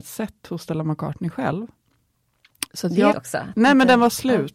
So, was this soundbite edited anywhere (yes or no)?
yes